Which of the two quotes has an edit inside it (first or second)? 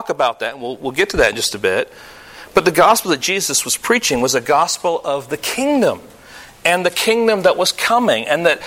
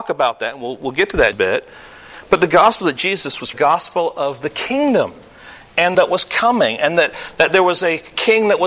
second